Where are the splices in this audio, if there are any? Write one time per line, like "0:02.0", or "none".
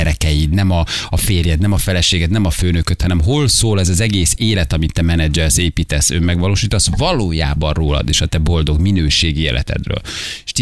none